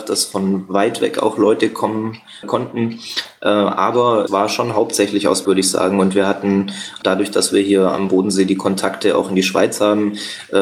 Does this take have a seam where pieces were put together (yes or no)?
yes